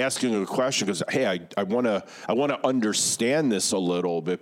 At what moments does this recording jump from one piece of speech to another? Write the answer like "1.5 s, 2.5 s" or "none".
none